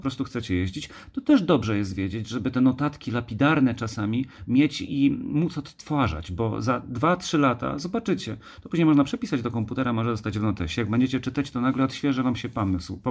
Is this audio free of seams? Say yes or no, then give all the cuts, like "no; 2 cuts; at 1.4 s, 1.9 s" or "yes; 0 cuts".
yes; 0 cuts